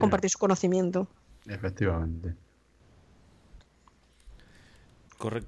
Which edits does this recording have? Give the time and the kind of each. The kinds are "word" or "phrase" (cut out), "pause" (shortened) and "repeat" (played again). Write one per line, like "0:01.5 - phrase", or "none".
none